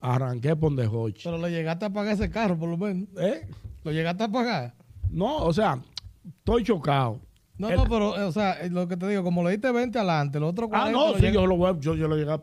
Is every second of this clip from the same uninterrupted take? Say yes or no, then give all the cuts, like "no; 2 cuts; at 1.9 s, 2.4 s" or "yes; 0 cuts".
yes; 0 cuts